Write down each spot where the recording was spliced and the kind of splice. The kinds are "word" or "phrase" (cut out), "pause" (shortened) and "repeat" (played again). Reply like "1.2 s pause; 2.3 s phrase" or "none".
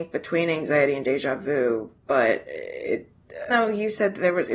2.0 s pause; 3.5 s phrase